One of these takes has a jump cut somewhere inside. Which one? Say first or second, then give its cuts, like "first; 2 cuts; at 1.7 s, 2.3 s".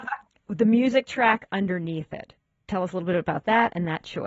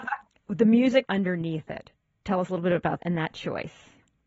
second; 2 cuts; at 1.0 s, 3.0 s